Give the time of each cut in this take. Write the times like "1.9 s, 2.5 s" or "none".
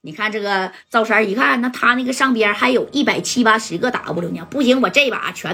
none